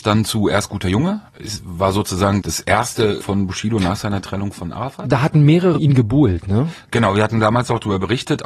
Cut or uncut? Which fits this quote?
cut